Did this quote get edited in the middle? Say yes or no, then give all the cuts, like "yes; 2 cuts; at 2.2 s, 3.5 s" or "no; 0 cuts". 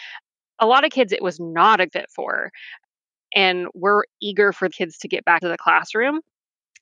yes; 3 cuts; at 1.9 s, 4.7 s, 5.4 s